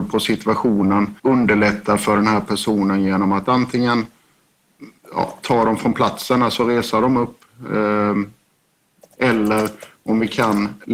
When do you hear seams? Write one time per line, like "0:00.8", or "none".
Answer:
0:01.2